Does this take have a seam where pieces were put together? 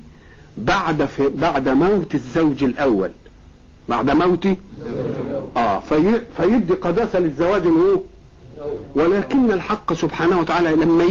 no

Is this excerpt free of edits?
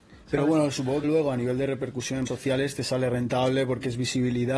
no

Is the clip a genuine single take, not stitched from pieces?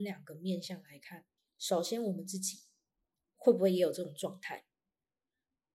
no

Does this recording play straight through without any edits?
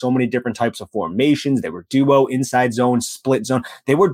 yes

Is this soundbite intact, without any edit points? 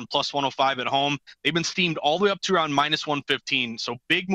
yes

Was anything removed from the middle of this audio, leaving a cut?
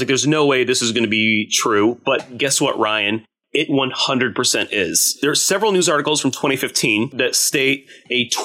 no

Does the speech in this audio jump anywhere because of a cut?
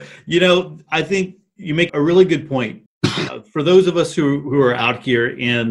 yes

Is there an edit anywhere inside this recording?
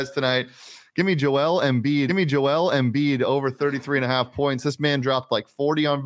yes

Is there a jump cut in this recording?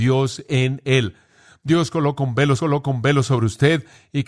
yes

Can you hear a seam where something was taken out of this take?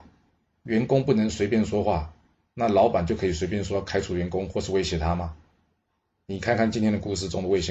no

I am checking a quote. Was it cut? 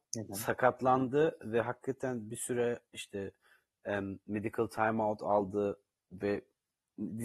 no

